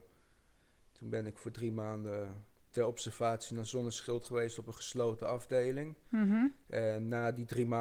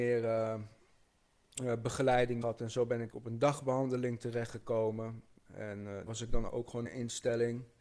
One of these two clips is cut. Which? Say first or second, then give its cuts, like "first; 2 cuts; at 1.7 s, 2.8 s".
second; 5 cuts; at 2.4 s, 3.1 s, 6.1 s, 6.5 s, 6.9 s